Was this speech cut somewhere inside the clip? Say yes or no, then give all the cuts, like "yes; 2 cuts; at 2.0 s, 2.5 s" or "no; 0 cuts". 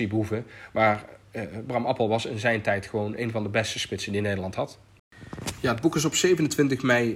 no; 0 cuts